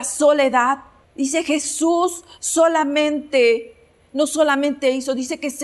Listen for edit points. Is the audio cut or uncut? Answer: cut